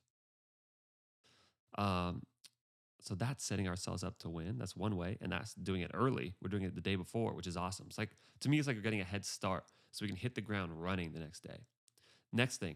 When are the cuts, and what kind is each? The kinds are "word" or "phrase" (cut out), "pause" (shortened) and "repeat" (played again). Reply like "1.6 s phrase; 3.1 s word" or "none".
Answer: none